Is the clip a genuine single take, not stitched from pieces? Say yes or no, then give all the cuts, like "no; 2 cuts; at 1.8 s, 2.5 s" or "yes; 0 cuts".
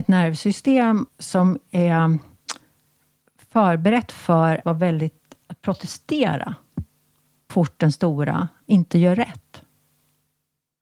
no; 4 cuts; at 1.1 s, 4.6 s, 5.4 s, 7.5 s